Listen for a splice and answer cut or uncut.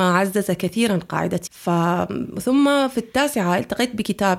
cut